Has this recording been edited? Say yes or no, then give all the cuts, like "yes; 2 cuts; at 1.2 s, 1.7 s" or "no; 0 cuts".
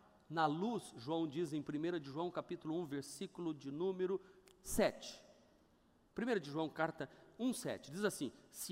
no; 0 cuts